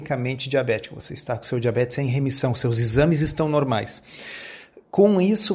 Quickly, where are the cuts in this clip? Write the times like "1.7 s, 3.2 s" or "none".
none